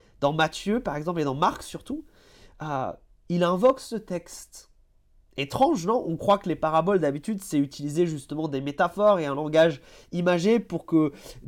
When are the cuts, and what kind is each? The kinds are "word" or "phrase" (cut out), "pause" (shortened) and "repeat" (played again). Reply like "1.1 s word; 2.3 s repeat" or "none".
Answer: none

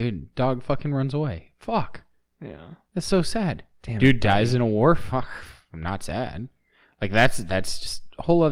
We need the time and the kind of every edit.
3.7 s pause

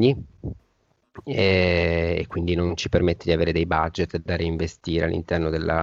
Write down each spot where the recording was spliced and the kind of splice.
none

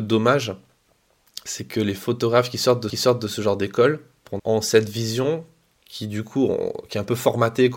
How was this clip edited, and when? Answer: 2.9 s repeat; 4.4 s phrase

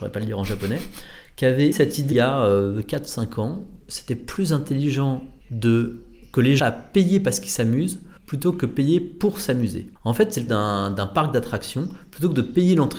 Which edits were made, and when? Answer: 1.7 s word; 2.1 s word; 3.8 s word; 5.4 s pause; 6.6 s phrase; 8.2 s pause; 10.0 s pause; 10.5 s word

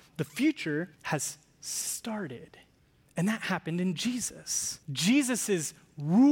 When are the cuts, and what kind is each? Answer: 0.9 s pause; 2.8 s pause; 4.8 s pause

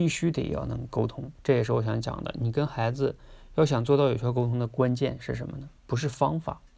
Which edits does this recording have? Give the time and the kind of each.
1.4 s pause; 5.8 s pause

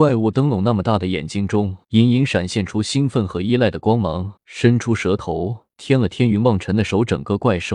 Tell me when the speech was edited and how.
1.8 s pause; 4.4 s pause; 5.7 s pause

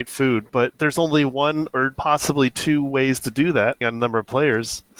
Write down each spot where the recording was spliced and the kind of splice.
3.8 s word

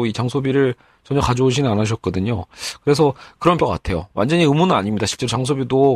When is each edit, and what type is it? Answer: 3.6 s phrase

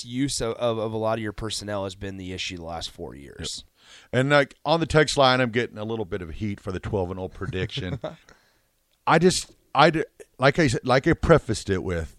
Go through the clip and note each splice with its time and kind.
8.2 s pause; 10.3 s pause

